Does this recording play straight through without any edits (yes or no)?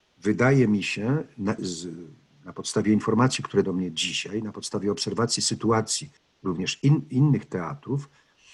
no